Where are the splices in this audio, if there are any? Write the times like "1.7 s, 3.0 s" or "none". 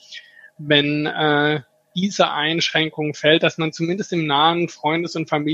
none